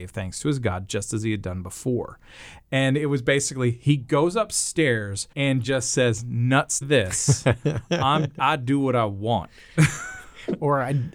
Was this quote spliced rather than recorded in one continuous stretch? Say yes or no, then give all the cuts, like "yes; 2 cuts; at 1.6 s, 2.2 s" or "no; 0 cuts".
yes; 2 cuts; at 5.3 s, 6.8 s